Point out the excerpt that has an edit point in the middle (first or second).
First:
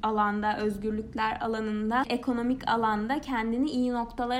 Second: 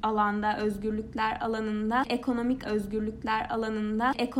second